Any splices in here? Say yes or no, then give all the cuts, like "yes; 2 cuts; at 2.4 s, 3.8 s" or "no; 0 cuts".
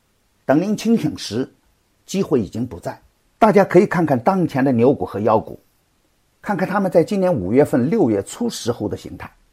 yes; 1 cut; at 3.2 s